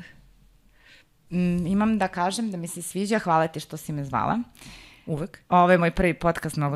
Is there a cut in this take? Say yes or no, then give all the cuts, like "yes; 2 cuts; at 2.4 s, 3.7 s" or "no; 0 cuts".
no; 0 cuts